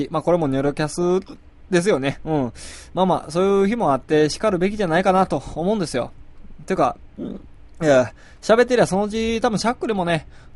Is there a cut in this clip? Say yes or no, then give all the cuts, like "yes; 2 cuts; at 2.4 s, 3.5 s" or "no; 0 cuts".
no; 0 cuts